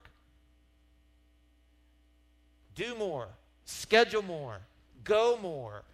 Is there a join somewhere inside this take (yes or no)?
no